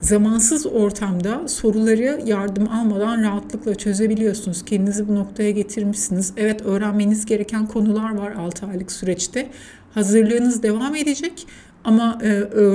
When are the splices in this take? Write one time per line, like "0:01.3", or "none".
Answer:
none